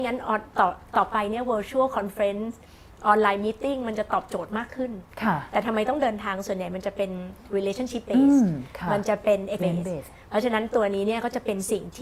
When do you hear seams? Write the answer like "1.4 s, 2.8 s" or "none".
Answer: 9.6 s